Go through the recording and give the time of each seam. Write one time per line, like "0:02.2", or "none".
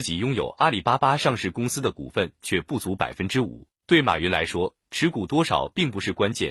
0:03.7